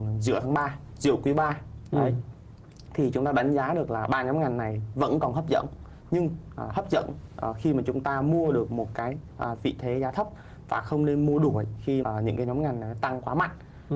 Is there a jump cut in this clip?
yes; 1 cut; at 12.0 s

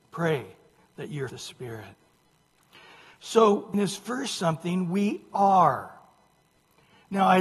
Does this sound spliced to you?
yes; 2 cuts; at 1.3 s, 3.7 s

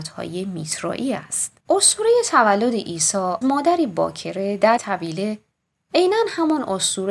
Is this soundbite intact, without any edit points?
no; 3 cuts; at 1.6 s, 3.4 s, 4.8 s

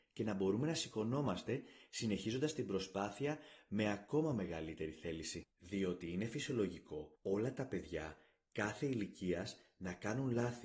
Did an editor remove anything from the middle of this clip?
yes; 2 cuts; at 5.5 s, 7.2 s

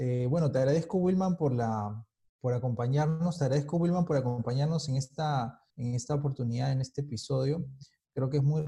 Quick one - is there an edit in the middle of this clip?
yes; 2 cuts; at 2.2 s, 5.7 s

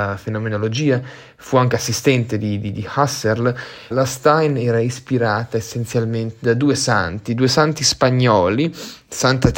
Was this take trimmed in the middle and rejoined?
yes; 1 cut; at 3.9 s

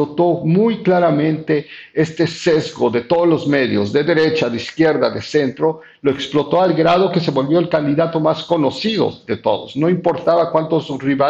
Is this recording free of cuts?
yes; 0 cuts

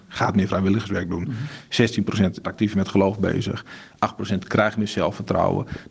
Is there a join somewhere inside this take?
yes; 1 cut; at 2.4 s

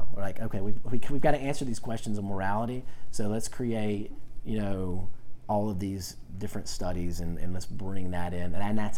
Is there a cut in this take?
no; 0 cuts

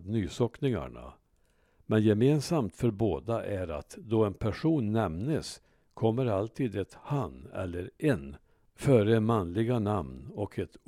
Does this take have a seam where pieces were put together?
no; 0 cuts

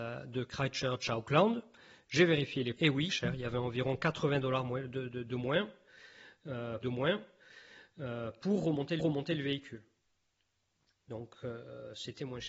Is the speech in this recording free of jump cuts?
no; 4 cuts; at 2.8 s, 3.1 s, 6.8 s, 9.0 s

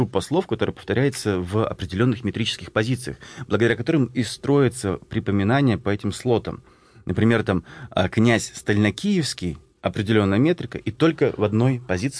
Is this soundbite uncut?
yes; 0 cuts

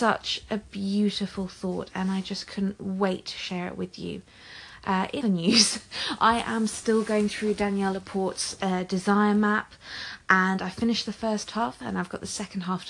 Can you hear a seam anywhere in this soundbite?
yes; 1 cut; at 5.2 s

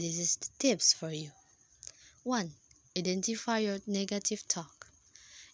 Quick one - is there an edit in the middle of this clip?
no; 0 cuts

